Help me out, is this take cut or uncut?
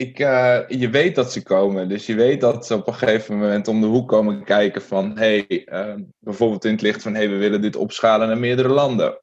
uncut